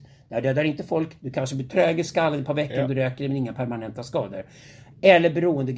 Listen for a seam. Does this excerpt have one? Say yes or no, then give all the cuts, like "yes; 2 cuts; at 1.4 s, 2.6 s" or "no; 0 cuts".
no; 0 cuts